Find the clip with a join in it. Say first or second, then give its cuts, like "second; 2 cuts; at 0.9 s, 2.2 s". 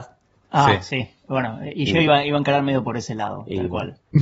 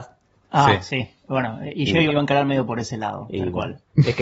second; 1 cut; at 2.1 s